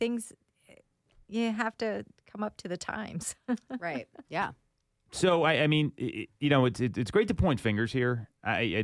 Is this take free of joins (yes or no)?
no